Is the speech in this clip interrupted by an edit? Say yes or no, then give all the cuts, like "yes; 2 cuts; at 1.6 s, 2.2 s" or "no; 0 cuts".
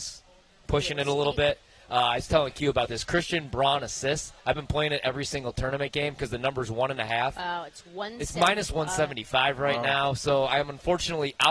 yes; 1 cut; at 4.4 s